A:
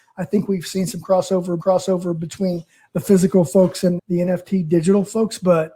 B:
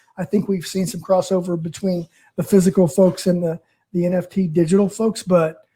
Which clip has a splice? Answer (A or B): A